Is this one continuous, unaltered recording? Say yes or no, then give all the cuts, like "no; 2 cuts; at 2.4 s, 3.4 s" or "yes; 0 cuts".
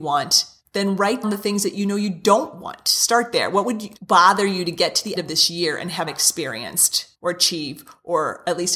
no; 5 cuts; at 1.2 s, 4.0 s, 5.2 s, 6.1 s, 7.1 s